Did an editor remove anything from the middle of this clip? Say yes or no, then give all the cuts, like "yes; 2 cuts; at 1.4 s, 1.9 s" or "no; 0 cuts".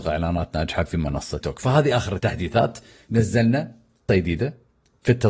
yes; 2 cuts; at 1.4 s, 4.1 s